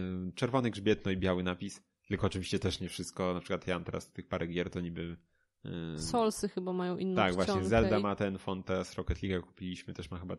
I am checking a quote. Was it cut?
no; 0 cuts

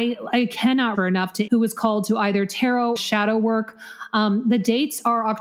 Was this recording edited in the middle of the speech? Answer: yes; 3 cuts; at 0.9 s, 1.5 s, 3.0 s

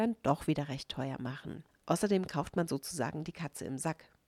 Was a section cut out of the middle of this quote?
yes; 1 cut; at 1.7 s

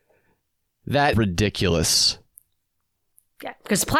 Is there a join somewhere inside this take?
yes; 1 cut; at 1.1 s

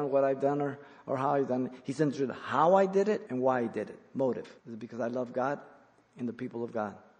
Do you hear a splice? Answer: yes; 2 cuts; at 3.3 s, 4.6 s

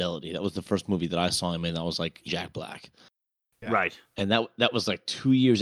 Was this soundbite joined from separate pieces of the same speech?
yes; 1 cut; at 2.3 s

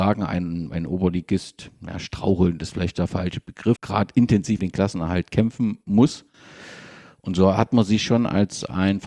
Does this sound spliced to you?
yes; 2 cuts; at 3.8 s, 4.6 s

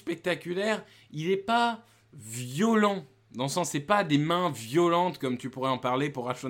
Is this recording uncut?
yes; 0 cuts

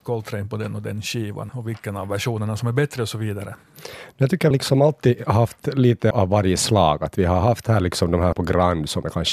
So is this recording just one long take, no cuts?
no; 4 cuts; at 1.5 s, 4.5 s, 6.1 s, 8.3 s

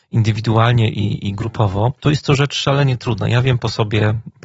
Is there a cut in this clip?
yes; 1 cut; at 2.0 s

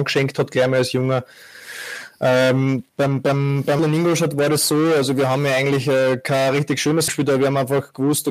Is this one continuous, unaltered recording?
no; 3 cuts; at 2.9 s, 3.8 s, 7.1 s

